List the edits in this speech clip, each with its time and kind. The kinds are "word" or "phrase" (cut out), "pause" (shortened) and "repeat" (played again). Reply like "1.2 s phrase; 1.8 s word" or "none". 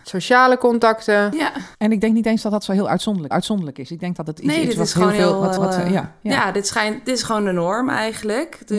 1.7 s pause; 3.3 s repeat; 5.6 s repeat